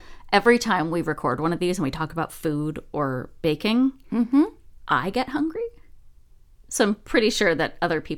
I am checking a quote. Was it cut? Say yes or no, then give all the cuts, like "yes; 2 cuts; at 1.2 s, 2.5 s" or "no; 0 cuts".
no; 0 cuts